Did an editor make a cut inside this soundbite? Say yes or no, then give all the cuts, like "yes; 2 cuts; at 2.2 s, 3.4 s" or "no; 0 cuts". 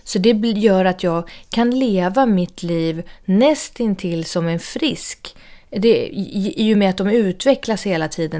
no; 0 cuts